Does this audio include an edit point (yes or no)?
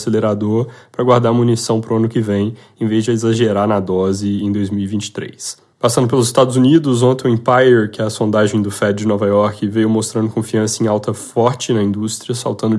yes